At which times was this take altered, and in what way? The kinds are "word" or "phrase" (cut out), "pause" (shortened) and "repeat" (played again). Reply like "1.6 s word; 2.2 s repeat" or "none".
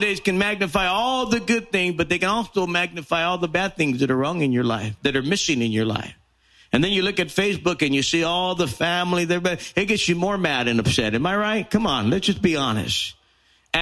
none